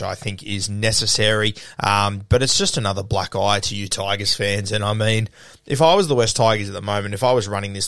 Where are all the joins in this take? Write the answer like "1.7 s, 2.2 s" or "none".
none